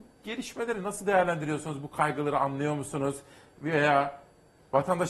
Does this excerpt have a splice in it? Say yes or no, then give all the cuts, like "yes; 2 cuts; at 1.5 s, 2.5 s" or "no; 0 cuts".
no; 0 cuts